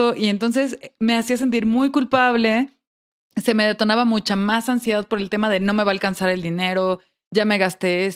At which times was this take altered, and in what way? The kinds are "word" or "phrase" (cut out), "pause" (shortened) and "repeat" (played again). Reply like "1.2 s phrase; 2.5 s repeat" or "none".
none